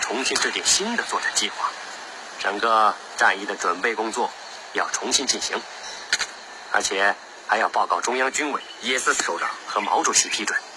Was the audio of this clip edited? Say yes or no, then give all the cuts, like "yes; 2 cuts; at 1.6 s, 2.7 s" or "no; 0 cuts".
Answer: no; 0 cuts